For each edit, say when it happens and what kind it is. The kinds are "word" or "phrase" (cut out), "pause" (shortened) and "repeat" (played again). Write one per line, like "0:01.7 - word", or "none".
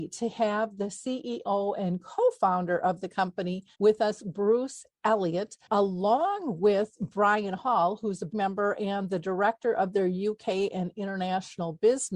0:03.7 - pause
0:08.3 - word

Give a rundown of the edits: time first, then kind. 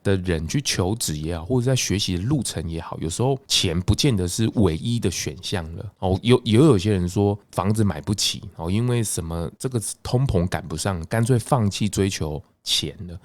0:09.5 - pause

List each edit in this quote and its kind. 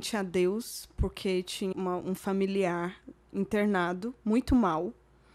0:01.7 - word

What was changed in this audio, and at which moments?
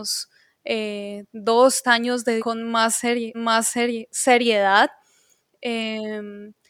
0:01.8 - word
0:02.4 - word
0:03.3 - repeat

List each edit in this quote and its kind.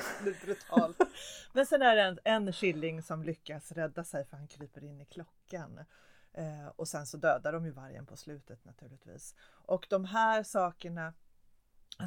none

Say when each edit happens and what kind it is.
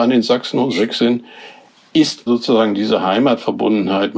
0:02.3 - word

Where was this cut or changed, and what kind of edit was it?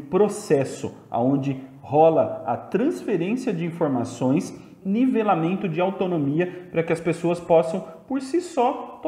0:04.8 - phrase

